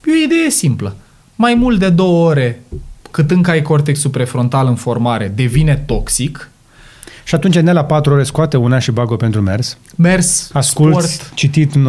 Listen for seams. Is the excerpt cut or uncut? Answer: cut